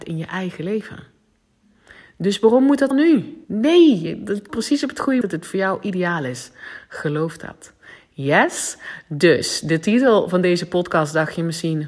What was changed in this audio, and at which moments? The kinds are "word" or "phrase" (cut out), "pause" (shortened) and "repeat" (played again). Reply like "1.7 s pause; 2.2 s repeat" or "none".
2.9 s word; 3.4 s pause; 4.5 s word; 5.2 s word